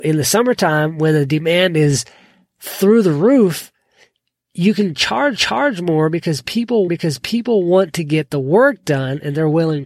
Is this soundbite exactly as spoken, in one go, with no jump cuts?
no; 2 cuts; at 5.4 s, 6.9 s

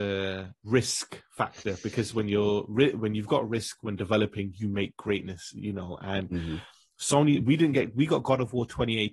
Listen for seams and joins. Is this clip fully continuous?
yes; 0 cuts

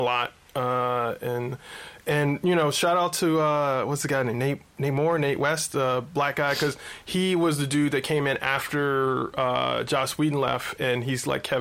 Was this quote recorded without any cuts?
yes; 0 cuts

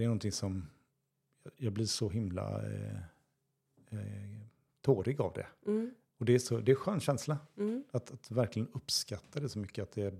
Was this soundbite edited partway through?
no; 0 cuts

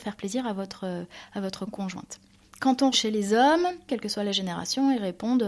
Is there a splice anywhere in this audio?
yes; 3 cuts; at 1.7 s, 2.9 s, 3.9 s

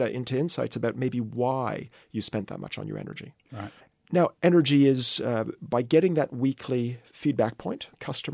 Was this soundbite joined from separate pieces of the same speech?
no; 0 cuts

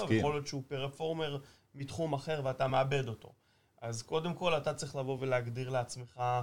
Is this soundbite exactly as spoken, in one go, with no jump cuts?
yes; 0 cuts

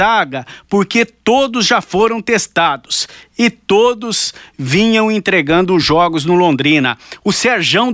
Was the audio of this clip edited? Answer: no; 0 cuts

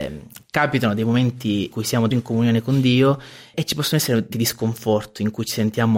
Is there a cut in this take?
yes; 4 cuts; at 1.7 s, 2.1 s, 3.5 s, 4.3 s

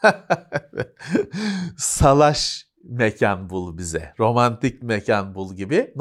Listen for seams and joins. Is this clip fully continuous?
yes; 0 cuts

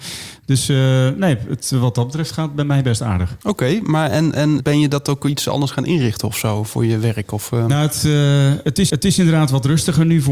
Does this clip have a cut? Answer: yes; 3 cuts; at 3.4 s, 4.6 s, 8.9 s

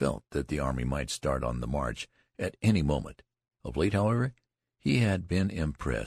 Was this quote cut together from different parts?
no; 0 cuts

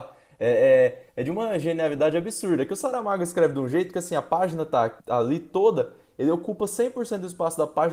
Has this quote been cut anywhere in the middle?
yes; 2 cuts; at 1.1 s, 5.0 s

